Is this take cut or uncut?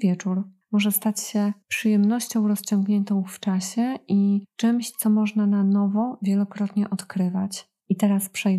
uncut